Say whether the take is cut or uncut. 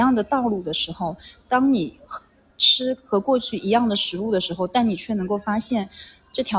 uncut